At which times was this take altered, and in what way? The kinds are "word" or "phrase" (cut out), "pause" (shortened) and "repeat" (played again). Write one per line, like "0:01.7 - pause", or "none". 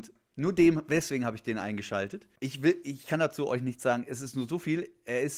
0:02.4 - pause

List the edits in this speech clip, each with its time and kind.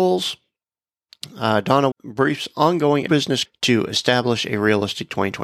0:01.9 - word
0:03.1 - phrase
0:03.4 - word

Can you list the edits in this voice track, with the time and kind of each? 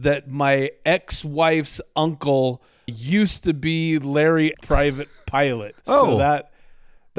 0:02.9 - word
0:04.5 - word
0:05.8 - pause

